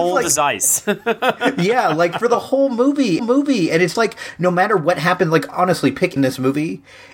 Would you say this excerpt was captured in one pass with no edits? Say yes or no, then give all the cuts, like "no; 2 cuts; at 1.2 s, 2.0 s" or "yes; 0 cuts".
no; 3 cuts; at 3.2 s, 3.9 s, 6.2 s